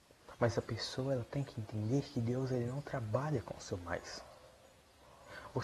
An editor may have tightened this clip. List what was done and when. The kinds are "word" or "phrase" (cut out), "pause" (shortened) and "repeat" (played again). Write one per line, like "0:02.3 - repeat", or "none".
none